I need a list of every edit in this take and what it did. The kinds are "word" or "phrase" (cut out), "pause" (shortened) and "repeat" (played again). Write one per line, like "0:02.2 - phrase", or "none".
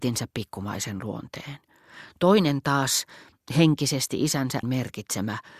0:04.6 - word